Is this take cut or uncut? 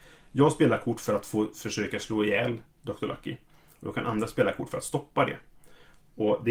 uncut